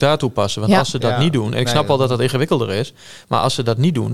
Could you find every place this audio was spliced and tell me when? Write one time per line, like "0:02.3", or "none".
none